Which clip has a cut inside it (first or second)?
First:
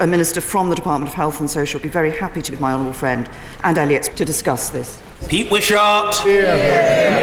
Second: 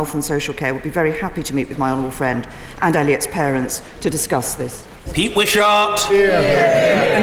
first